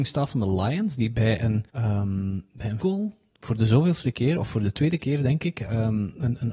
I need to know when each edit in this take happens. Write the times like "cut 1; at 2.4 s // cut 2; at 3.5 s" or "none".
cut 1; at 1.7 s // cut 2; at 2.8 s